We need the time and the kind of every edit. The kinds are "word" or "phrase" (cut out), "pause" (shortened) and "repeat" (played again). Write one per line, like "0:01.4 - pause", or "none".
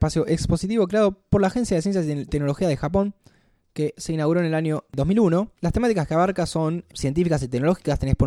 0:05.6 - pause